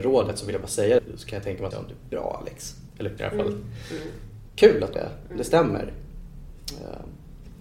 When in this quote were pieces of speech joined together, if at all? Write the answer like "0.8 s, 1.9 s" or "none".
1.0 s, 1.7 s, 3.2 s, 4.9 s